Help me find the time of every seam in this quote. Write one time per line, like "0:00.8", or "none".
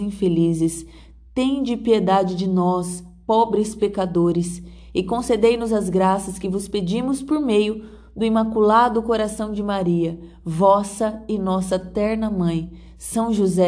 none